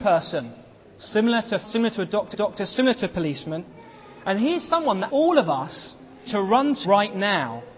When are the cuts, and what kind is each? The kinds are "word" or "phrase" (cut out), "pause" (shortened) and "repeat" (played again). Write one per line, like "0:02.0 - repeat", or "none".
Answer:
0:01.6 - word
0:02.3 - repeat
0:05.1 - word
0:06.3 - word
0:06.8 - word